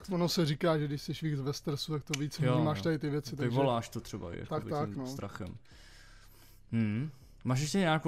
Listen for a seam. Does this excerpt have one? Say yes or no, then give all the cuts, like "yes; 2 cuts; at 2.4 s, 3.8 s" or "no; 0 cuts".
no; 0 cuts